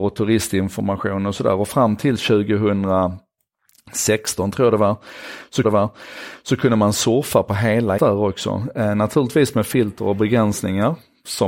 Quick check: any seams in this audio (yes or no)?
yes